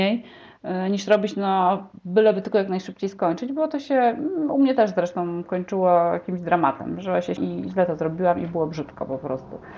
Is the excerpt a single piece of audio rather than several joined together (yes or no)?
no